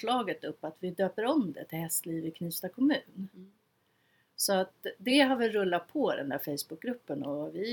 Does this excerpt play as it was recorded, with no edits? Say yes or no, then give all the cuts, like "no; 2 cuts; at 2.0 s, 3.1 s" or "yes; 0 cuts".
yes; 0 cuts